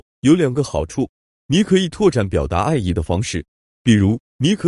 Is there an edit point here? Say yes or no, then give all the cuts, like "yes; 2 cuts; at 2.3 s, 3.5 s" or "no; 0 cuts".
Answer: no; 0 cuts